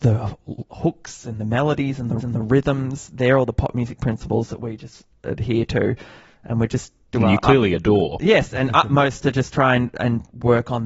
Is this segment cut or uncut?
cut